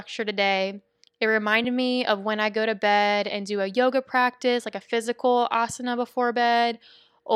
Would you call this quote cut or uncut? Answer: uncut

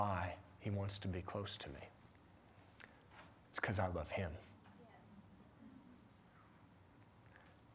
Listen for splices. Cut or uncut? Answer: uncut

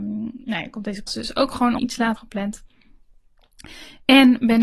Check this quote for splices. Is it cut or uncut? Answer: cut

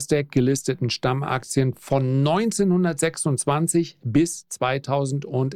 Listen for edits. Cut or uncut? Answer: uncut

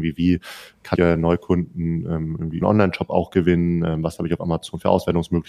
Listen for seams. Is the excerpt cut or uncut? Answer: cut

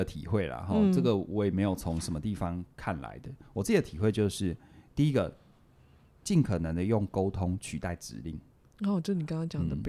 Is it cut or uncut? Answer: uncut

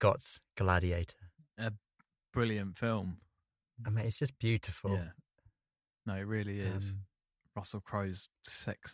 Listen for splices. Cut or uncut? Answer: uncut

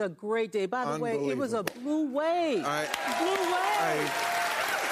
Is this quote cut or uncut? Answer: uncut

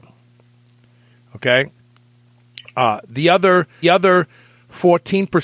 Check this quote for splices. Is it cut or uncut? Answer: cut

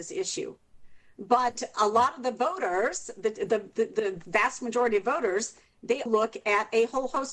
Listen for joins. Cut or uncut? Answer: cut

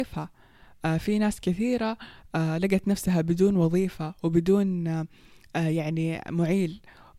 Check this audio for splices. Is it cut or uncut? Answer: uncut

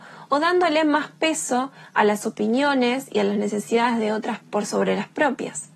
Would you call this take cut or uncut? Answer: cut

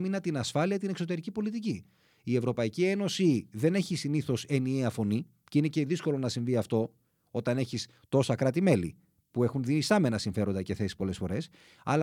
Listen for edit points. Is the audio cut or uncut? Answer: uncut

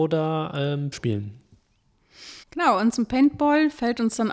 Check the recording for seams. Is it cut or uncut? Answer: cut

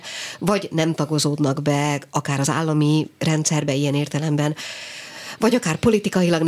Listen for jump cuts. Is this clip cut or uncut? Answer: uncut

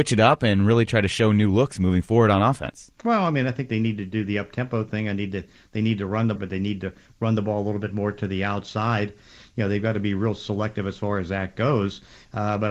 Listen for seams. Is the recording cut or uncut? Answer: cut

